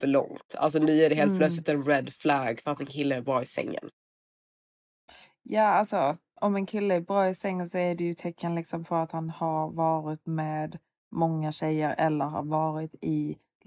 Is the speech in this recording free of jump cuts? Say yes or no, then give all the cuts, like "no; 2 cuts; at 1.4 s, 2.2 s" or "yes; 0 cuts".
yes; 0 cuts